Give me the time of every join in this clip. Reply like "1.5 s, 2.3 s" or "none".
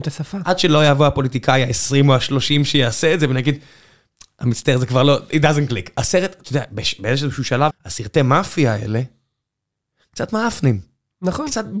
7.7 s